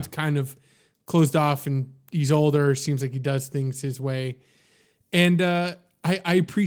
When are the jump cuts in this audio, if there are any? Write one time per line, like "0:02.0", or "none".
none